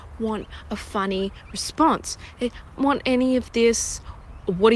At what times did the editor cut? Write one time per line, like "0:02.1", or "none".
0:02.8